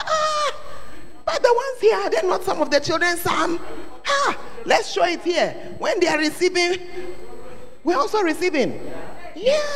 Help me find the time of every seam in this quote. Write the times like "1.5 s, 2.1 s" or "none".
none